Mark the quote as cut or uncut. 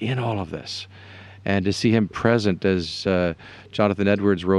uncut